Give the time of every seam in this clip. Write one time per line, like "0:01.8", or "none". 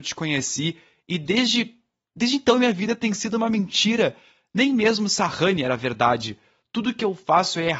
none